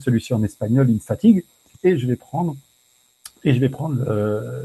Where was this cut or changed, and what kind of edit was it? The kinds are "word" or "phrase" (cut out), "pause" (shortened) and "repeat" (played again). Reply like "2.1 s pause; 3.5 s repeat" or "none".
none